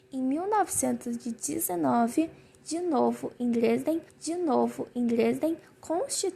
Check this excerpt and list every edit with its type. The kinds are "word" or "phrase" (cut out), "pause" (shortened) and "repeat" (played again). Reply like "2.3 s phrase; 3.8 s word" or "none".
4.1 s repeat